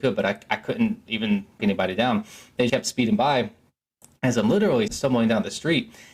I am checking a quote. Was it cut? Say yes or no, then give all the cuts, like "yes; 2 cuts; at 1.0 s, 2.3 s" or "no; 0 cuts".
yes; 3 cuts; at 1.6 s, 2.7 s, 4.9 s